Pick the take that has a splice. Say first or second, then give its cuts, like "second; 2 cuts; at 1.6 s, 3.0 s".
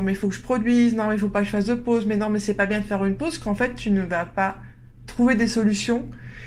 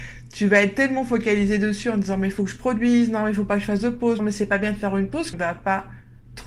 second; 2 cuts; at 4.2 s, 5.3 s